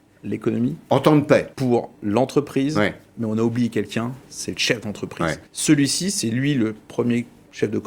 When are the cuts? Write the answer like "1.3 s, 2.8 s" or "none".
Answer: 1.5 s, 5.5 s